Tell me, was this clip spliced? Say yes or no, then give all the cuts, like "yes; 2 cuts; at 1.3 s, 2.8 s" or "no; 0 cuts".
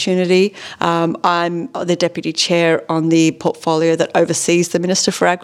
no; 0 cuts